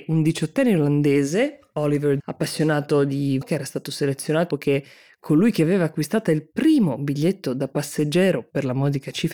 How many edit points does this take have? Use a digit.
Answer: 4